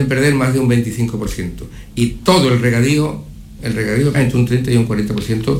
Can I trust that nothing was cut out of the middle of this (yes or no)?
no